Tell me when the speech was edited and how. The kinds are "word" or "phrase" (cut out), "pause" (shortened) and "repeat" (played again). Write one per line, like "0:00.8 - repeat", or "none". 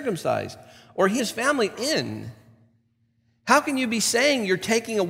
0:01.2 - word
0:01.7 - word